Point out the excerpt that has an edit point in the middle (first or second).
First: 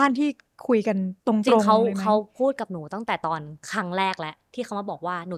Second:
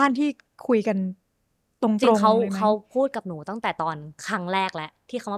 first